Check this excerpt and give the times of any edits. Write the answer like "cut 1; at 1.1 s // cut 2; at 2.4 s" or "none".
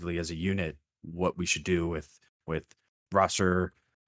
none

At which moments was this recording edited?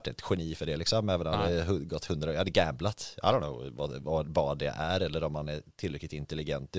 none

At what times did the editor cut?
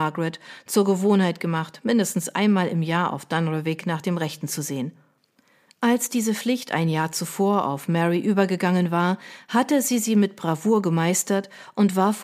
none

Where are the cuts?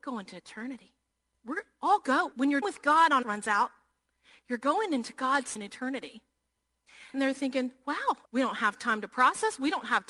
cut 1; at 1.1 s // cut 2; at 2.3 s // cut 3; at 2.6 s // cut 4; at 3.2 s // cut 5; at 5.6 s // cut 6; at 7.1 s // cut 7; at 8.2 s

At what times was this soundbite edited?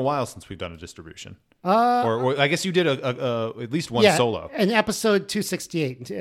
none

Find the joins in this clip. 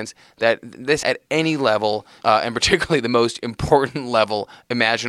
cut 1; at 1.0 s // cut 2; at 2.2 s

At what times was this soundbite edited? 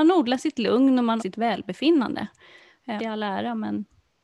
cut 1; at 1.2 s // cut 2; at 3.0 s

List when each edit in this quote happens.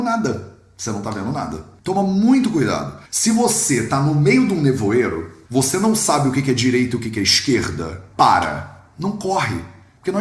cut 1; at 3.1 s

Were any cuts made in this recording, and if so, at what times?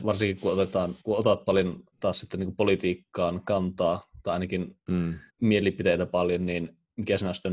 cut 1; at 1.0 s // cut 2; at 1.9 s // cut 3; at 5.3 s

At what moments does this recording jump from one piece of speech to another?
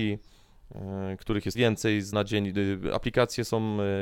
cut 1; at 1.5 s // cut 2; at 2.1 s

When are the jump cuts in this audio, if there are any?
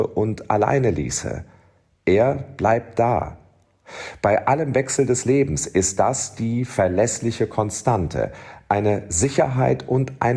none

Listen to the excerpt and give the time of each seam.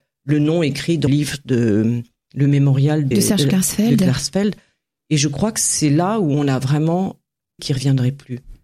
cut 1; at 1.1 s // cut 2; at 3.1 s // cut 3; at 7.6 s

